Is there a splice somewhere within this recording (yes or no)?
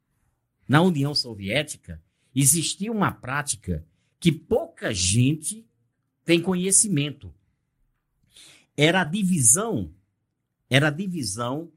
no